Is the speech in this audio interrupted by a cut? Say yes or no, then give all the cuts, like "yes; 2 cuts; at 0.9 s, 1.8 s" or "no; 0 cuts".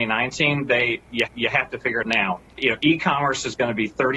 yes; 3 cuts; at 1.3 s, 2.0 s, 2.5 s